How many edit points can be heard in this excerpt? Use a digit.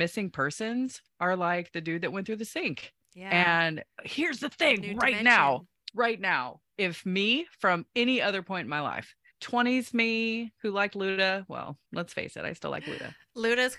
3